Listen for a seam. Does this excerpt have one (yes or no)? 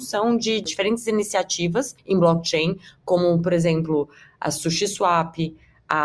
no